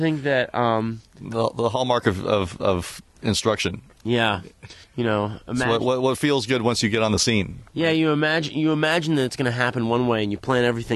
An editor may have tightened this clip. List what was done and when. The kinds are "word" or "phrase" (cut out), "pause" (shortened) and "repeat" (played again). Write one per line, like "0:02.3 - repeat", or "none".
0:03.1 - pause
0:04.8 - pause